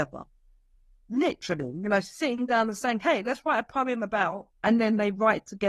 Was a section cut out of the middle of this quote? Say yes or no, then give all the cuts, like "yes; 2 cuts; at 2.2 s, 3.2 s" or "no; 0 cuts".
yes; 1 cut; at 4.5 s